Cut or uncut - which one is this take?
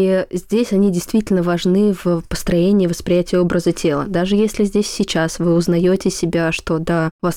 uncut